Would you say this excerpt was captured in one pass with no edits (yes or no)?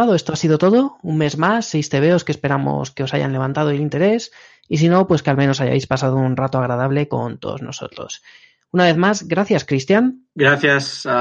yes